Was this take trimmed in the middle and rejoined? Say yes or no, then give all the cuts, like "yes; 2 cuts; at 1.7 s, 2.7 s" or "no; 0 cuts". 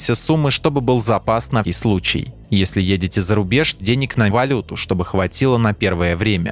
yes; 3 cuts; at 1.6 s, 3.8 s, 4.3 s